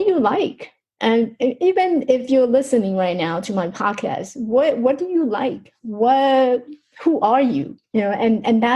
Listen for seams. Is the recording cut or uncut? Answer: cut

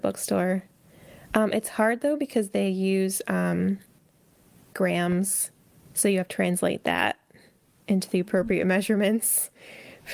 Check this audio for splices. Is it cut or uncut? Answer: cut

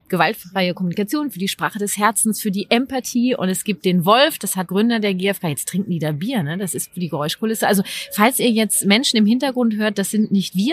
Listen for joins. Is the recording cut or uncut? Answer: cut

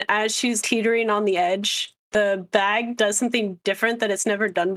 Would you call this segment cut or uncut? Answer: uncut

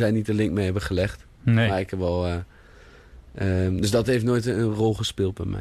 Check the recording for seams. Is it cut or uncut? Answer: uncut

